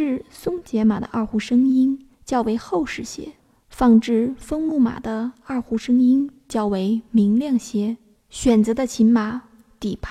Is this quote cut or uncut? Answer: cut